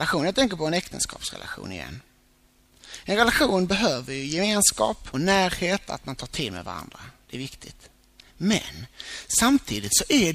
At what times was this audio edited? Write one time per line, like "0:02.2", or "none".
0:05.1